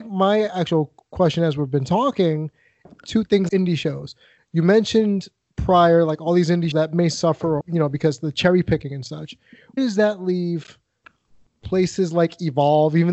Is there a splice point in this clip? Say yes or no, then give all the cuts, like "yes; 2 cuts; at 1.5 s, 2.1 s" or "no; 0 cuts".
yes; 5 cuts; at 2.8 s, 3.5 s, 6.7 s, 7.6 s, 9.8 s